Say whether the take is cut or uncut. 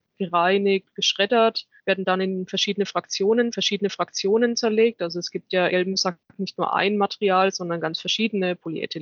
cut